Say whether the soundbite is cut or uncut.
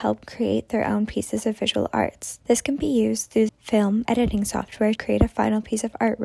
cut